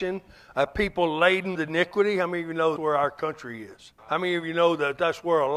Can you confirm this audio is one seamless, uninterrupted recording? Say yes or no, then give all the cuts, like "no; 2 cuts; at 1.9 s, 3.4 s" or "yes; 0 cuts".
no; 3 cuts; at 1.5 s, 2.8 s, 4.0 s